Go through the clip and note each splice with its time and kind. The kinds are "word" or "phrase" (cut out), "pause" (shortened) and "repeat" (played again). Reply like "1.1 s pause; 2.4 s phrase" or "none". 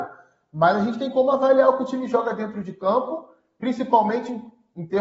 none